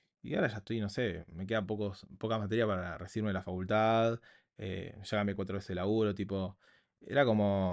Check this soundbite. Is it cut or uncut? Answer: uncut